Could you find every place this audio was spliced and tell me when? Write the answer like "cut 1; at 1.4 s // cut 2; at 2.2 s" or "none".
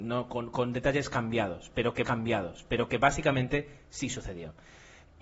cut 1; at 2.0 s